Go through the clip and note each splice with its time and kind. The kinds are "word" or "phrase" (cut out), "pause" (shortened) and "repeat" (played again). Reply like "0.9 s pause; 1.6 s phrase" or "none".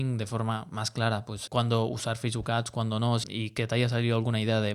1.5 s word; 3.2 s phrase